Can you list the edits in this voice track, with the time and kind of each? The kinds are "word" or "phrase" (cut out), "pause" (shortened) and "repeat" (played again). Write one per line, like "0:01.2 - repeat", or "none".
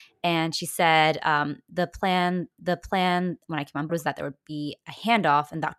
0:02.5 - repeat
0:03.9 - word